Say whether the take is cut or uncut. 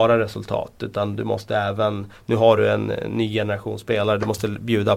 uncut